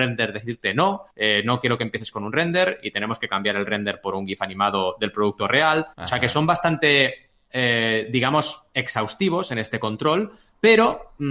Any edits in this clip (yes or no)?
yes